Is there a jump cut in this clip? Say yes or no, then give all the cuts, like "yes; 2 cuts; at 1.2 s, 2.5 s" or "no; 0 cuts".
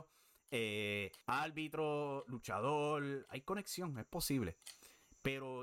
yes; 1 cut; at 1.2 s